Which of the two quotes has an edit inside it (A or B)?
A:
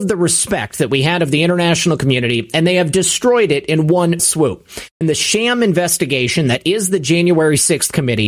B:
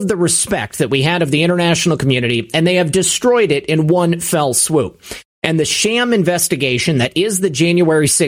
A